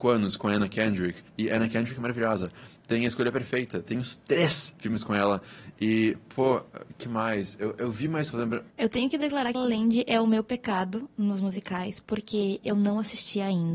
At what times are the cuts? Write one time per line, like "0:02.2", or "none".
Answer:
0:01.3
0:08.3
0:09.5